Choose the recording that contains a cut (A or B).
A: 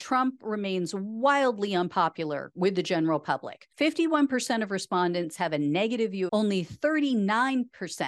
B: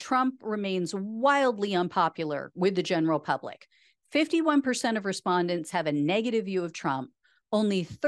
A